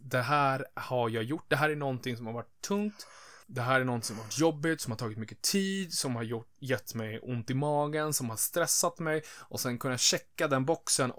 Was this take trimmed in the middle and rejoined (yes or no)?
yes